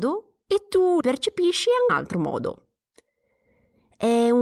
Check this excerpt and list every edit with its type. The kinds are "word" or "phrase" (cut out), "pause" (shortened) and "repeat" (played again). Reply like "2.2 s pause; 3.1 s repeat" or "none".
1.0 s word; 1.9 s phrase

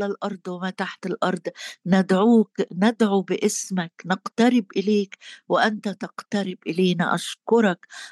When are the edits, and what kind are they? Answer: none

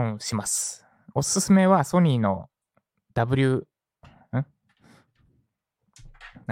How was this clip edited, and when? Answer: none

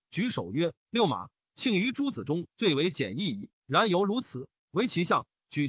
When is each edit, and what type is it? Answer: 4.6 s pause

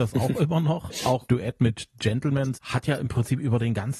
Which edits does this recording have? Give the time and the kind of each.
1.3 s word; 2.5 s word

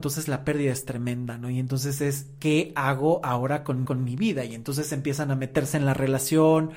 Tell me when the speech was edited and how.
3.9 s repeat

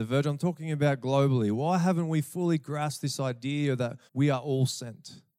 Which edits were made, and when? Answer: 4.1 s pause

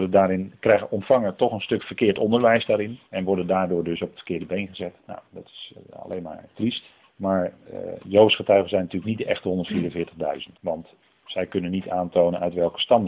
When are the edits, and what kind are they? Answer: 3.1 s pause; 5.0 s pause; 7.0 s pause; 10.6 s pause

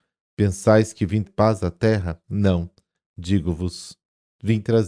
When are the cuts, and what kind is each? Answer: 1.2 s word; 2.2 s pause

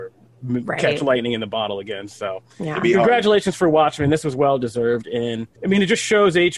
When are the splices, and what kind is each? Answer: 5.6 s pause

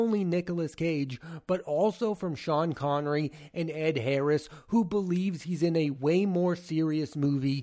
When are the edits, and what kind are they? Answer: none

